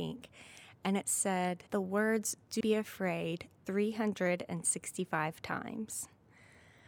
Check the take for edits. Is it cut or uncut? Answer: cut